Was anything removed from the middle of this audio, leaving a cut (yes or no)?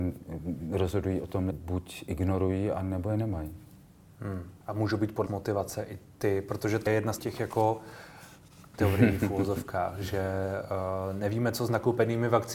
yes